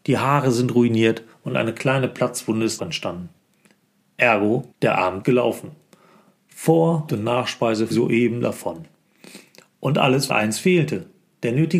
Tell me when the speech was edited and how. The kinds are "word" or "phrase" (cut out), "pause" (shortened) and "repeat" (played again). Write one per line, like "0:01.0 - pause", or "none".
0:02.8 - word
0:04.7 - pause
0:05.2 - word
0:07.1 - word
0:07.9 - word
0:10.3 - word